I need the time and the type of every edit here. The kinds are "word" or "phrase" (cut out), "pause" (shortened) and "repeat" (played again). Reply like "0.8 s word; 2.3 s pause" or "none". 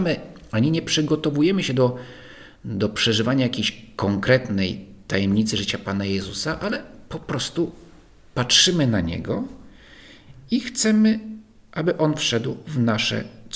none